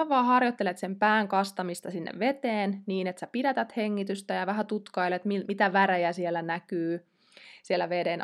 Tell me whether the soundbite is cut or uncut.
uncut